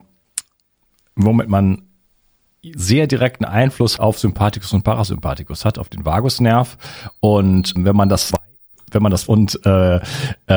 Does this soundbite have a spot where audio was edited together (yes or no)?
yes